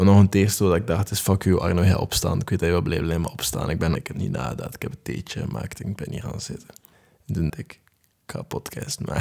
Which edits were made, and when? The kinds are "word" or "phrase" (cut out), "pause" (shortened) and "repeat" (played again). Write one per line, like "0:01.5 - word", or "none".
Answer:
0:03.9 - word
0:06.9 - pause
0:07.5 - word